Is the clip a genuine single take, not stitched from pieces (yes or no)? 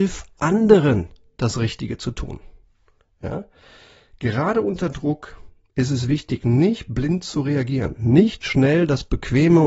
yes